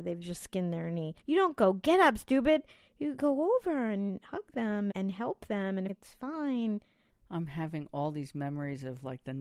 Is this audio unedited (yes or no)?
no